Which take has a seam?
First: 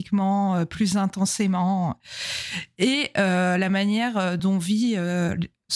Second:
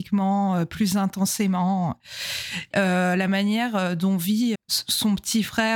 second; 2 cuts; at 2.7 s, 4.5 s

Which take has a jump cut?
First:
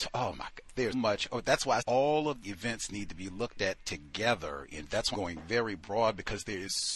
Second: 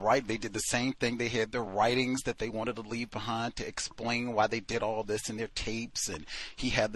first; 4 cuts; at 0.9 s, 1.8 s, 2.4 s, 5.1 s

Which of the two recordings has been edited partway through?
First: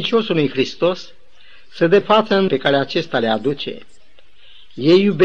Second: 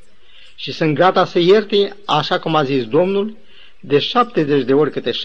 first; 2 cuts; at 2.0 s, 2.5 s

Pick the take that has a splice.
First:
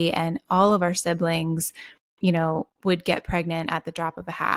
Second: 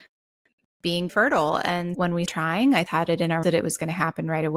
second; 5 cuts; at 1.1 s, 1.9 s, 2.3 s, 2.9 s, 3.4 s

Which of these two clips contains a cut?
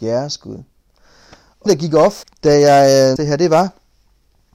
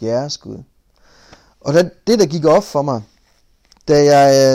first; 3 cuts; at 1.7 s, 2.2 s, 3.2 s

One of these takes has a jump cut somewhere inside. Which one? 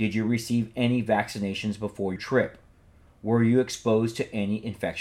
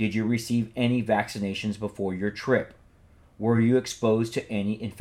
first; 1 cut; at 2.2 s

